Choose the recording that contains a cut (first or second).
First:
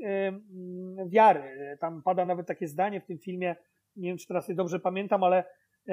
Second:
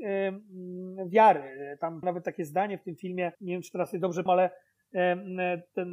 second